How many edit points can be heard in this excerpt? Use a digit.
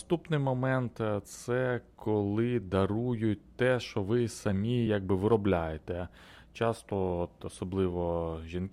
0